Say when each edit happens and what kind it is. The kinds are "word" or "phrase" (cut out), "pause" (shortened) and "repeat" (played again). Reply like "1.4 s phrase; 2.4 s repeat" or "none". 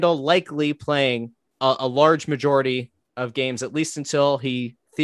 none

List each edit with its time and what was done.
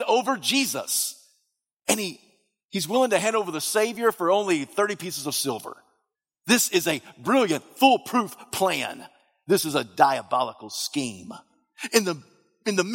none

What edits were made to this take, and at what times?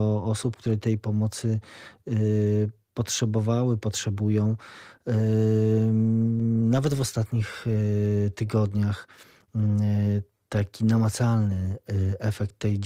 none

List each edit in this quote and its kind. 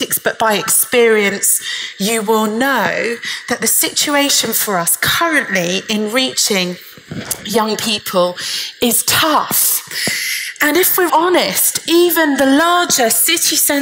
11.1 s word

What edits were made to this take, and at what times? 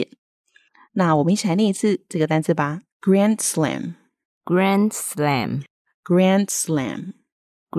2.9 s pause

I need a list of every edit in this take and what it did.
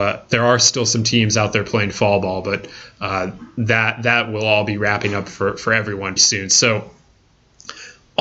6.2 s word

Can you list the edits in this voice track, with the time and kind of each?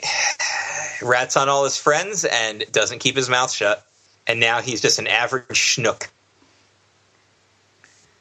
4.1 s pause

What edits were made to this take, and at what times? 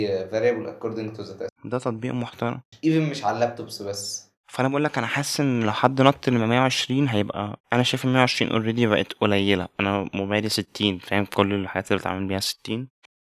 1.5 s pause; 7.6 s pause

